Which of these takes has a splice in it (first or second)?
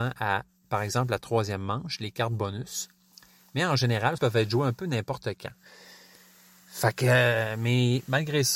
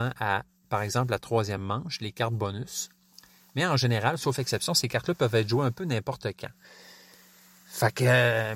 first